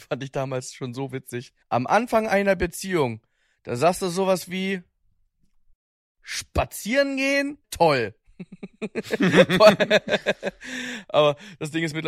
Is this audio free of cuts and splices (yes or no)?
no